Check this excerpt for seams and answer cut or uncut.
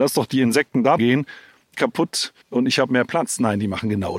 cut